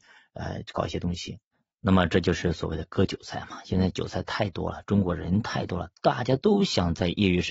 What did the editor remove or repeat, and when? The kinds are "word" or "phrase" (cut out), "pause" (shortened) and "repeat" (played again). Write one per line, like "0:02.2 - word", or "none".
none